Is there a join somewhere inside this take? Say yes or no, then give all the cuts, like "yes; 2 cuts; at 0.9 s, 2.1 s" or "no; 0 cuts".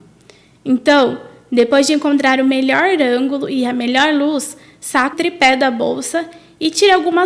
yes; 1 cut; at 5.1 s